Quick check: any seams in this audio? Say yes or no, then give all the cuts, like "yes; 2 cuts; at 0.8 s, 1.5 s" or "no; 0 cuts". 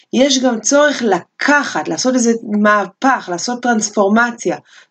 no; 0 cuts